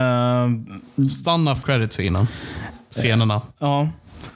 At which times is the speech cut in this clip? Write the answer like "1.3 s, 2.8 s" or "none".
1.6 s